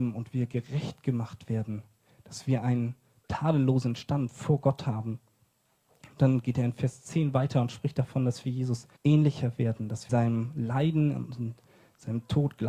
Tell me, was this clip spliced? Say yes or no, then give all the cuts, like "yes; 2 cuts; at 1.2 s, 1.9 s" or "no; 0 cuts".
yes; 2 cuts; at 9.0 s, 10.1 s